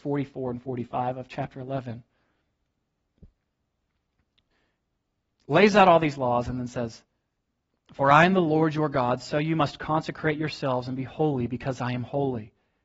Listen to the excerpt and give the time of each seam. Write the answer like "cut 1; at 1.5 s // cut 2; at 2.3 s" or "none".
none